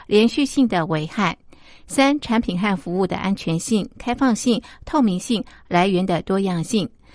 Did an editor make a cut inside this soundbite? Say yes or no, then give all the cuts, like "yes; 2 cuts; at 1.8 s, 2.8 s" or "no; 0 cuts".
no; 0 cuts